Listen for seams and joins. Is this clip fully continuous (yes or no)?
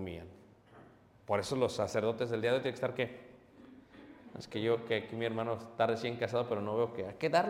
yes